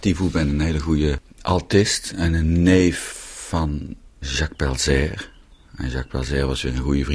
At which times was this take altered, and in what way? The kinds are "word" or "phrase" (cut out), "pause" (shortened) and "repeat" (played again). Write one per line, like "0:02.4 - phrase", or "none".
none